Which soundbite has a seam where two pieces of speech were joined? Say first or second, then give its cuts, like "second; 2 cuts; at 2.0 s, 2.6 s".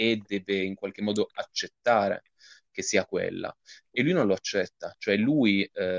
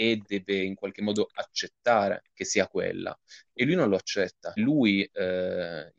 second; 2 cuts; at 2.3 s, 4.6 s